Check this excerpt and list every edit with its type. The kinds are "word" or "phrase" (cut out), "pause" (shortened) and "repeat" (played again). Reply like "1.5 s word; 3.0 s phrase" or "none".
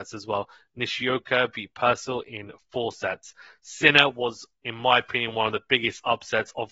4.5 s pause